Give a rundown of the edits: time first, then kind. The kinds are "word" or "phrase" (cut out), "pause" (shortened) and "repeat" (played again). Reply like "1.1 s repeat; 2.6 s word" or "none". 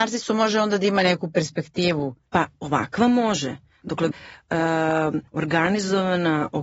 4.1 s phrase; 5.3 s pause